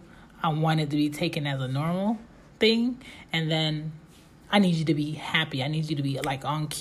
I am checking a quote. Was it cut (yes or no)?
no